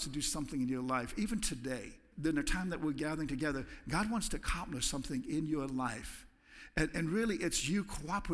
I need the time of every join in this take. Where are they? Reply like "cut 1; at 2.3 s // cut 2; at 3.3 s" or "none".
cut 1; at 2.1 s

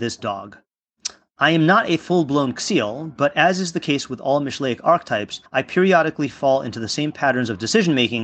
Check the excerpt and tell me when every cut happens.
cut 1; at 5.5 s

